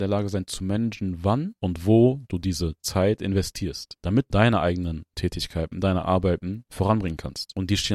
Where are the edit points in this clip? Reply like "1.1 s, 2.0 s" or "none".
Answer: 4.3 s, 6.0 s